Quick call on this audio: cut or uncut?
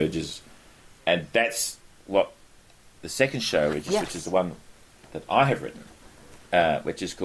uncut